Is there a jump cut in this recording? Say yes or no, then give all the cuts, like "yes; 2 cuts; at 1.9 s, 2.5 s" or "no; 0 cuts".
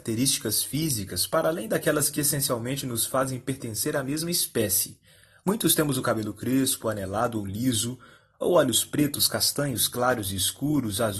no; 0 cuts